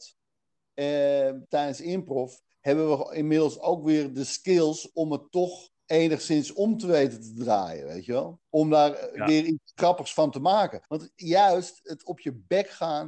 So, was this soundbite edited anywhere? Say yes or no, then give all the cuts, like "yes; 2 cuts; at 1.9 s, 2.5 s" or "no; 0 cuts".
yes; 3 cuts; at 5.8 s, 8.5 s, 10.9 s